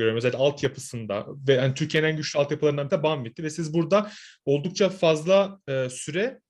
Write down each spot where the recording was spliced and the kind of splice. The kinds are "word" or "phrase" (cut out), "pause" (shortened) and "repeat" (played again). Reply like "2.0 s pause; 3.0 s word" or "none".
2.9 s word